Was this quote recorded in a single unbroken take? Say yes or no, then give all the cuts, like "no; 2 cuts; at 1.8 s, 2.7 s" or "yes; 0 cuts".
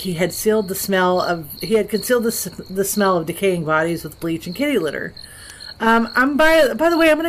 yes; 0 cuts